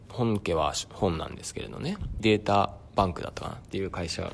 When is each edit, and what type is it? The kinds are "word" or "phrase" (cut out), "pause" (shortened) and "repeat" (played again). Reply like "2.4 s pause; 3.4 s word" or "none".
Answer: 2.2 s word